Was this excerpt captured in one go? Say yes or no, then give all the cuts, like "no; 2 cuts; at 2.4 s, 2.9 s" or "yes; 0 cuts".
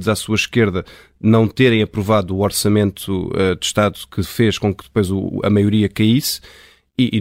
yes; 0 cuts